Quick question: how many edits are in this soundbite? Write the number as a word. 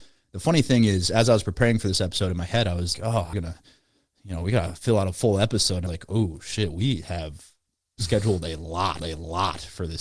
four